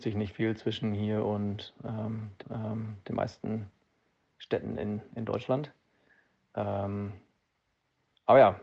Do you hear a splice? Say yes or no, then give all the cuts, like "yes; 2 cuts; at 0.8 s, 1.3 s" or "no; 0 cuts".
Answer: yes; 1 cut; at 2.4 s